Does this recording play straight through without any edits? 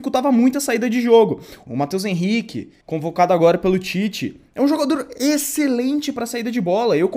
no; 2 cuts; at 1.7 s, 2.8 s

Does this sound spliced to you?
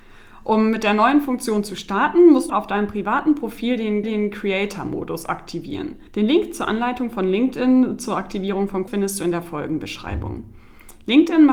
yes; 4 cuts; at 2.5 s, 4.0 s, 6.1 s, 8.9 s

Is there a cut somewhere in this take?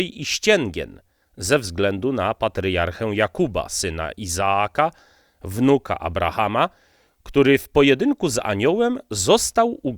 no; 0 cuts

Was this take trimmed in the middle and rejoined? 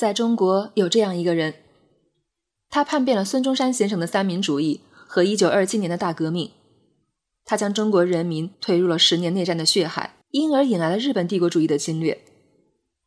yes; 2 cuts; at 8.5 s, 10.2 s

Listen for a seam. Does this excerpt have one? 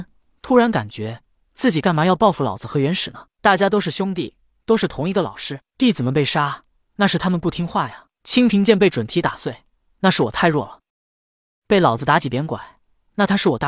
no; 0 cuts

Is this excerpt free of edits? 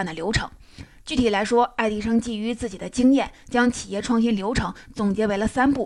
yes; 0 cuts

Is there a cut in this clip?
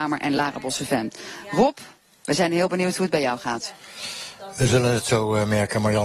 no; 0 cuts

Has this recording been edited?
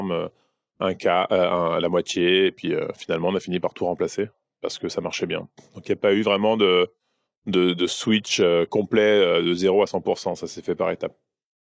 no; 0 cuts

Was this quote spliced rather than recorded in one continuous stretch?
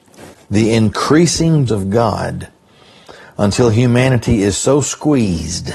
yes; 1 cut; at 1.7 s

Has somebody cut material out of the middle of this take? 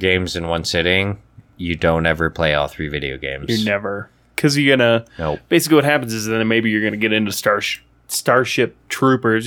no; 0 cuts

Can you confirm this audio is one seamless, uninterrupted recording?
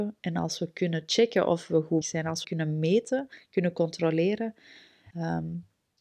no; 3 cuts; at 2.0 s, 2.4 s, 5.1 s

